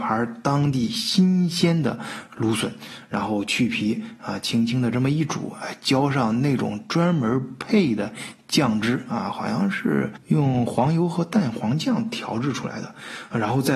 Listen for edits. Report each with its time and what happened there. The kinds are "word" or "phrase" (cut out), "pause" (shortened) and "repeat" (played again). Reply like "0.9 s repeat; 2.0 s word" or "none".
none